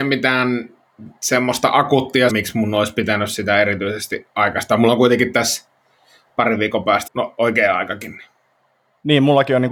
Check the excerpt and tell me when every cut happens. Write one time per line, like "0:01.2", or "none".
0:02.3
0:07.1